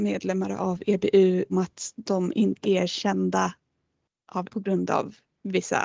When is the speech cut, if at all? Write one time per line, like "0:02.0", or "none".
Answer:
0:01.5
0:02.6
0:04.5